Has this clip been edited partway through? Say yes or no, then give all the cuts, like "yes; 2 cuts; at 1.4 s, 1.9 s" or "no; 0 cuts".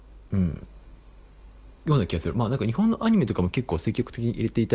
yes; 1 cut; at 1.8 s